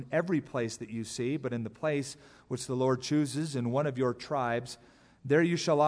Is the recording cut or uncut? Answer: uncut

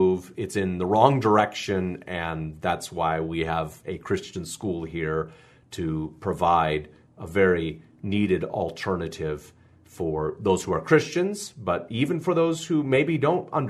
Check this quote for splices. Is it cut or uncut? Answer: uncut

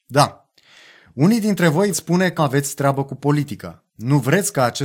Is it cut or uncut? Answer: cut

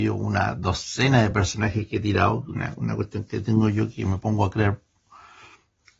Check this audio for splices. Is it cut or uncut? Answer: uncut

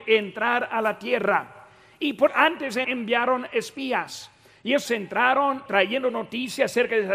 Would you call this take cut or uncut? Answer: cut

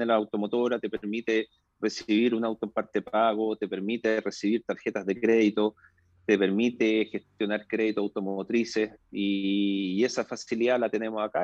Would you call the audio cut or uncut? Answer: uncut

